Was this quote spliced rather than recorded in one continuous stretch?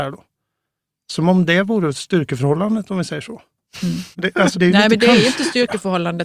yes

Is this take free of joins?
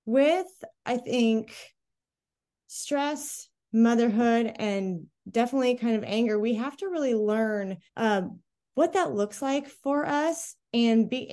no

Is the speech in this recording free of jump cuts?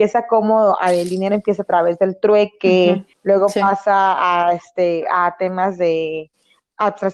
no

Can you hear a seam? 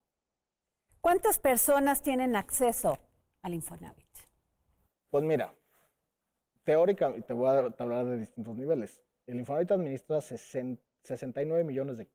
no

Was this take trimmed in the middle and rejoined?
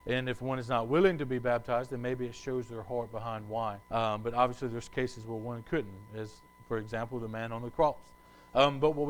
yes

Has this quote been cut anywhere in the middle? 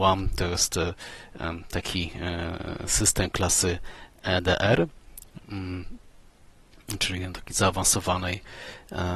no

